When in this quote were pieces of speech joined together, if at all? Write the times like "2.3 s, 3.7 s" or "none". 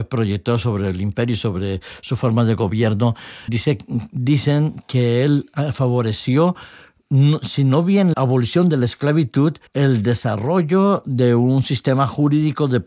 3.5 s, 8.1 s, 9.7 s